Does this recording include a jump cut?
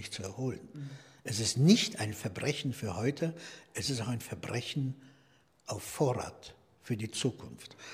no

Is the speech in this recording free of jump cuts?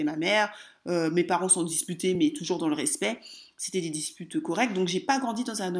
yes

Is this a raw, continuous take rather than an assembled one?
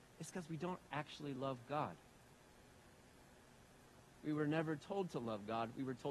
yes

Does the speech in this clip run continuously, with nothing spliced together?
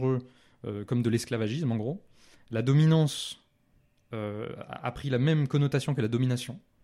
yes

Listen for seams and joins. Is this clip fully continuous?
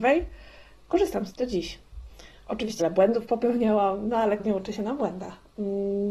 no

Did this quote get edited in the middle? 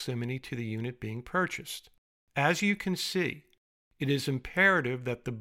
no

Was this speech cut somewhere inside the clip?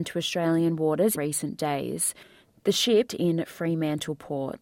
yes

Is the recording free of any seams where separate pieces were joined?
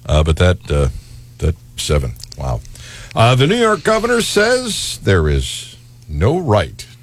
no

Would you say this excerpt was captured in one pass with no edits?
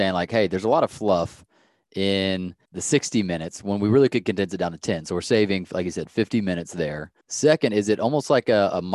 no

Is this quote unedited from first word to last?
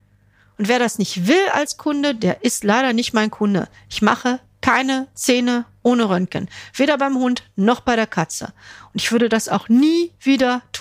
yes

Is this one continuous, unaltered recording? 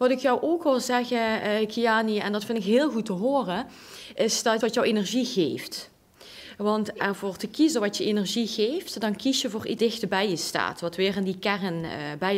no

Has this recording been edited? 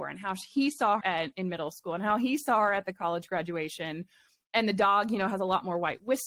yes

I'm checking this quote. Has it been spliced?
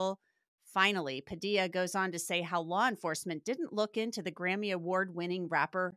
no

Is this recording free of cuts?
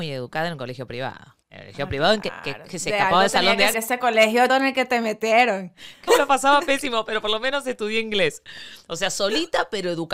no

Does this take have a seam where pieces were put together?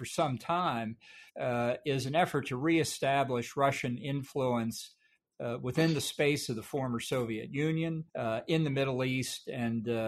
yes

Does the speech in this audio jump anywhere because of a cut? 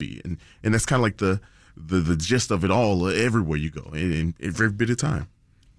no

